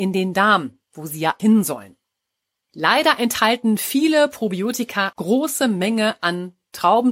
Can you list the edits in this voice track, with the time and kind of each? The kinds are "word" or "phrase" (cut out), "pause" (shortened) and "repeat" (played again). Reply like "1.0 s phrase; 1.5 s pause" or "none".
1.4 s word; 5.1 s word